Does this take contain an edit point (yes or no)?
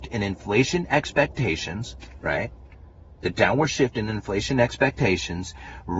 no